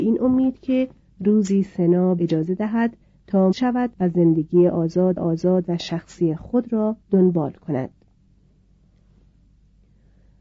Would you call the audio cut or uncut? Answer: cut